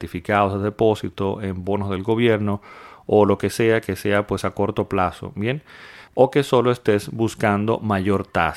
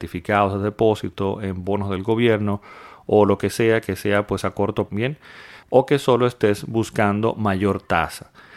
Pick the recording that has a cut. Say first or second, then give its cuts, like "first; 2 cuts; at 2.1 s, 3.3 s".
second; 1 cut; at 4.9 s